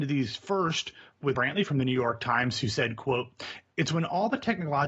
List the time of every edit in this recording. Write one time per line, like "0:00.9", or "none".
0:01.3